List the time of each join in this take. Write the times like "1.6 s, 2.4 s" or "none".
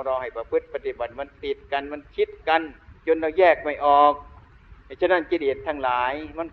3.0 s